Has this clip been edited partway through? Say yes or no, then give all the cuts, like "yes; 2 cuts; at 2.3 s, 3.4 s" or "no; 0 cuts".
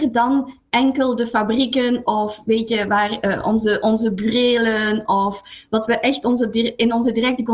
no; 0 cuts